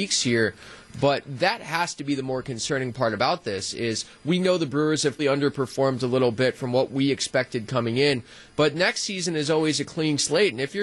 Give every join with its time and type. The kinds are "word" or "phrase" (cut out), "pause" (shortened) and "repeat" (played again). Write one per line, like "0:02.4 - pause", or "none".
0:05.2 - word